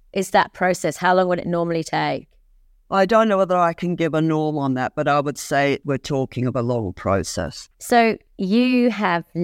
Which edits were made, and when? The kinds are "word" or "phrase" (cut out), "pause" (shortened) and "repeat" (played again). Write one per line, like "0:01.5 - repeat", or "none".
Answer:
0:02.6 - pause
0:07.7 - pause